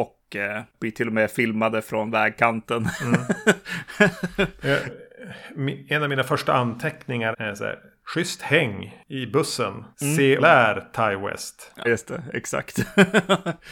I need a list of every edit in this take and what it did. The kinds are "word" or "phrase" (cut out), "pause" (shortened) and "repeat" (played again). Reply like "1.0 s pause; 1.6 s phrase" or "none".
7.3 s word; 9.9 s pause; 10.4 s word; 11.8 s word